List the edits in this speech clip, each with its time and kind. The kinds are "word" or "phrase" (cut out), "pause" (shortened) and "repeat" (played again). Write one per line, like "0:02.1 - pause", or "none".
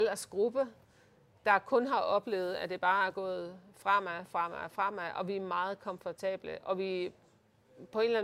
none